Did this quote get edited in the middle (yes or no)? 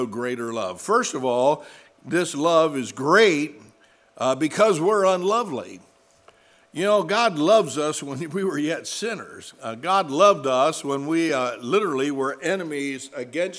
no